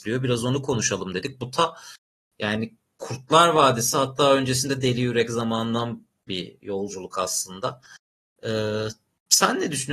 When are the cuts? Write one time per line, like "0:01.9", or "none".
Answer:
0:06.3